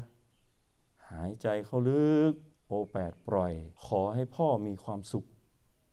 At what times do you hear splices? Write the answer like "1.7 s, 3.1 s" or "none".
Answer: 2.5 s, 3.8 s